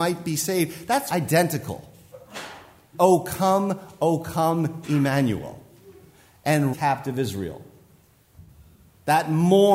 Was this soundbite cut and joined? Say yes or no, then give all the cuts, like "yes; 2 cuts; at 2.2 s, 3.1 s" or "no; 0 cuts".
yes; 3 cuts; at 1.1 s, 2.9 s, 6.7 s